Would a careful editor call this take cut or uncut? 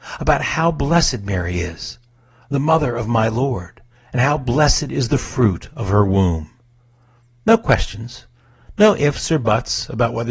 cut